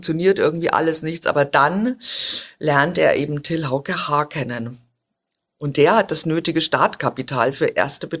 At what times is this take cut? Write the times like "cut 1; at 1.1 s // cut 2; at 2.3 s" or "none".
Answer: none

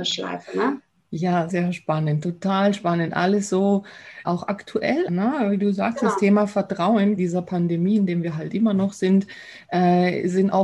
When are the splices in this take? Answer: cut 1; at 1.5 s // cut 2; at 4.2 s // cut 3; at 5.1 s // cut 4; at 7.2 s

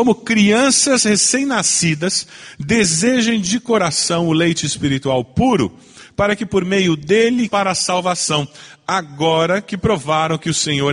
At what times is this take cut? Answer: cut 1; at 7.5 s

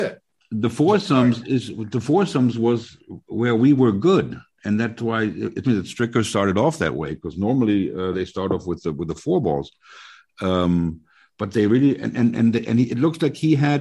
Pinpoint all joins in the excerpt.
cut 1; at 5.6 s

